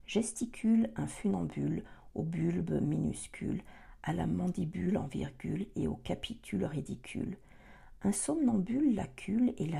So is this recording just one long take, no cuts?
yes; 0 cuts

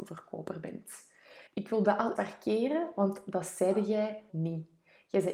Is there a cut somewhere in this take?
yes; 3 cuts; at 1.5 s, 2.2 s, 4.3 s

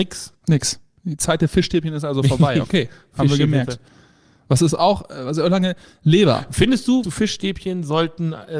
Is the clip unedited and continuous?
no; 1 cut; at 7.0 s

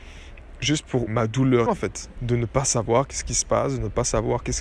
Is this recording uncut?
no; 3 cuts; at 1.1 s, 1.7 s, 2.2 s

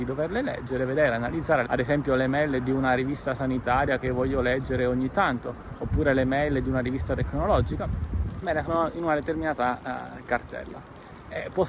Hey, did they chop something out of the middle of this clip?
no; 0 cuts

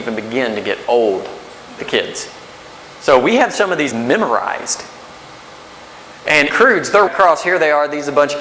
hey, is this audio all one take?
no; 4 cuts; at 1.8 s, 3.9 s, 6.5 s, 7.1 s

